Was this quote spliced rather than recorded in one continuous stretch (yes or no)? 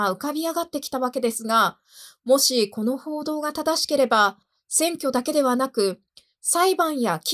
no